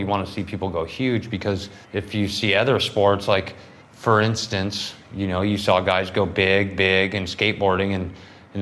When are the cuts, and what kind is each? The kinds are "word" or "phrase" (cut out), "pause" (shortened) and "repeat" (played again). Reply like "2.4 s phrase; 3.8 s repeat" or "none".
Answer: 1.8 s pause; 3.8 s pause